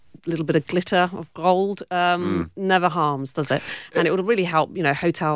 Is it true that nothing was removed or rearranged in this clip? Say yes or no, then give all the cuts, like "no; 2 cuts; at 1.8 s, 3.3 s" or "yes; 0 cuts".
yes; 0 cuts